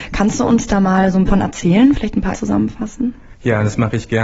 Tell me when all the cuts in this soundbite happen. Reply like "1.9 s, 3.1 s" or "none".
1.3 s, 2.3 s

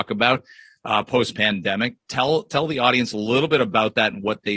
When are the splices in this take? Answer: none

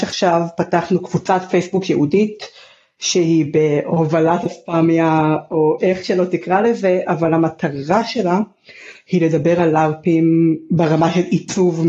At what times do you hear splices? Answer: none

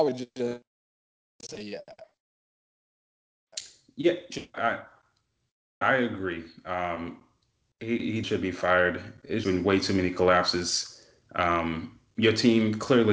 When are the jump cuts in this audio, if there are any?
4.5 s, 5.8 s, 8.2 s, 9.4 s

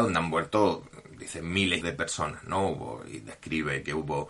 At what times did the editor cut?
1.8 s

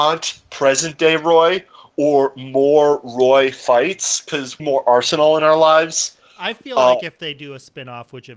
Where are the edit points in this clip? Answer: 4.6 s

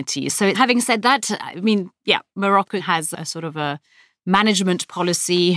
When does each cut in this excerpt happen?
none

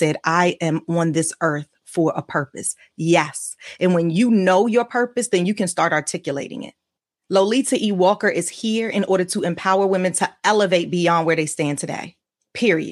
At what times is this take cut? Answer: 7.0 s

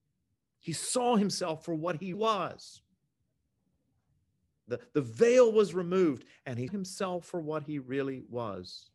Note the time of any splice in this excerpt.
2.1 s, 6.7 s

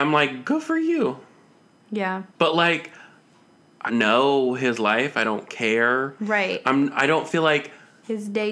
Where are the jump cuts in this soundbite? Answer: 2.3 s, 3.9 s

